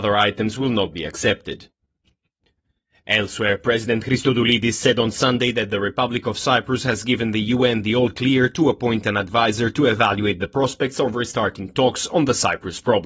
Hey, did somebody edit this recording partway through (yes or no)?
no